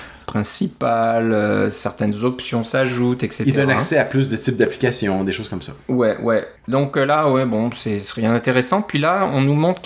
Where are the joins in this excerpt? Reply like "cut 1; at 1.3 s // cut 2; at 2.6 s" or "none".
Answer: cut 1; at 6.6 s